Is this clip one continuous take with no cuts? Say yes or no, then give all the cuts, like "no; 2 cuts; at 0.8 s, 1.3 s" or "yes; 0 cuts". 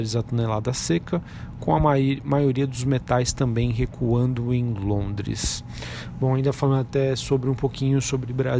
yes; 0 cuts